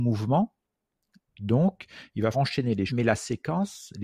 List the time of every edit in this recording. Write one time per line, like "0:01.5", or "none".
0:02.3
0:02.9